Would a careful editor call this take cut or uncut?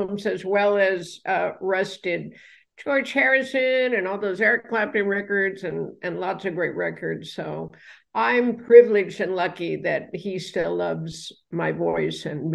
uncut